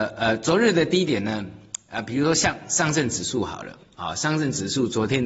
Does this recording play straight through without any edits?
yes; 0 cuts

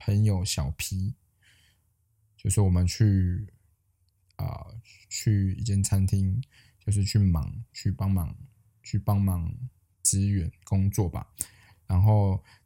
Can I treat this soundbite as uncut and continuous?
yes; 0 cuts

